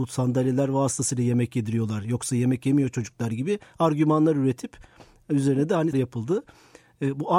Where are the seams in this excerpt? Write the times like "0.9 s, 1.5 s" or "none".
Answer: 5.9 s